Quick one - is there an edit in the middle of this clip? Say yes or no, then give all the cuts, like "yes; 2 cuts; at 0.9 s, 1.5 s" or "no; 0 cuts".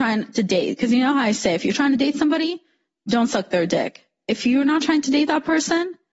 no; 0 cuts